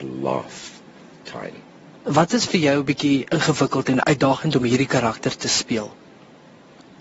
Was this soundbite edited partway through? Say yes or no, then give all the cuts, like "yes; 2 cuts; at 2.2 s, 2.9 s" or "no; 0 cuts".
no; 0 cuts